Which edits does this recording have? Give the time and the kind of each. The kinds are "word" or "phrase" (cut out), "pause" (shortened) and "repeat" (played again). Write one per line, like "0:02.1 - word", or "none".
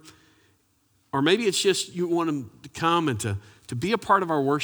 none